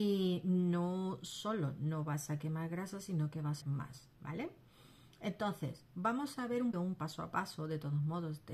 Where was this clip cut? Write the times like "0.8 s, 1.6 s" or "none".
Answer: 3.6 s, 4.2 s, 6.7 s